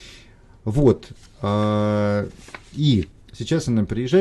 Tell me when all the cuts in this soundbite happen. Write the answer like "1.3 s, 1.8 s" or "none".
3.2 s